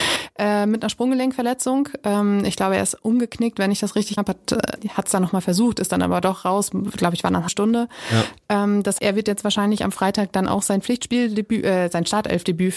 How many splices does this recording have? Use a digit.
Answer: 4